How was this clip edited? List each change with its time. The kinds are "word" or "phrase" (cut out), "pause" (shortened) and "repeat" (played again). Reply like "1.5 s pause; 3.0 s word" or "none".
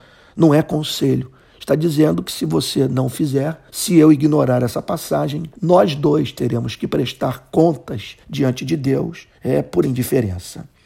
3.7 s pause; 5.5 s pause; 8.2 s pause; 9.3 s pause; 9.8 s word